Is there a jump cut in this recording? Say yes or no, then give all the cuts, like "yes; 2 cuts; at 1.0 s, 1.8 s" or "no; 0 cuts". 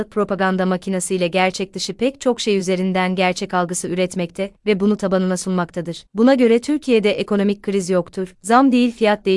no; 0 cuts